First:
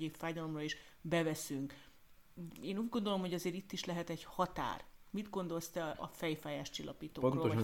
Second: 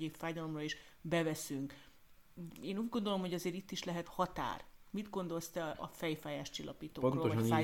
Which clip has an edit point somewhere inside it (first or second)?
second